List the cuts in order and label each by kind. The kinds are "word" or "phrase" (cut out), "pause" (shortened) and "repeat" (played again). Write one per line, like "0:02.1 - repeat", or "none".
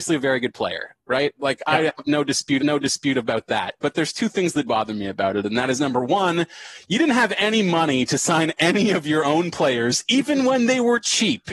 0:02.6 - repeat
0:04.6 - word